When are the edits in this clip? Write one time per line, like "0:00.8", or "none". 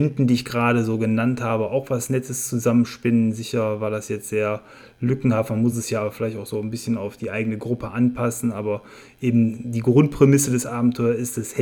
none